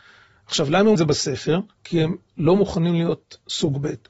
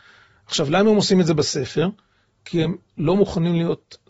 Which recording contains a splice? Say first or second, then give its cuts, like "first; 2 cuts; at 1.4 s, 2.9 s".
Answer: first; 2 cuts; at 1.0 s, 1.7 s